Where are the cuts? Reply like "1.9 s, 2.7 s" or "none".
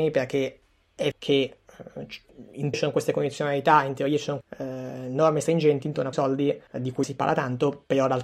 1.1 s, 2.7 s, 4.4 s, 6.1 s, 6.7 s, 7.0 s